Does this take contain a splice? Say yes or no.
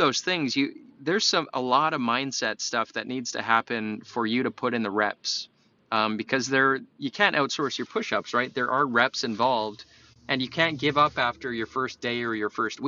no